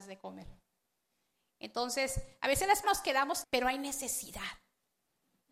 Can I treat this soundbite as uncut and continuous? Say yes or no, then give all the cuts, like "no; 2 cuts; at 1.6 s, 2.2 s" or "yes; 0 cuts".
no; 2 cuts; at 2.8 s, 3.4 s